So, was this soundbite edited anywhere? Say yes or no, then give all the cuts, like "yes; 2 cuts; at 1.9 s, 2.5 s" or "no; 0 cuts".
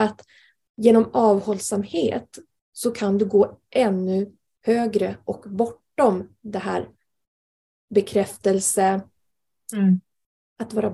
no; 0 cuts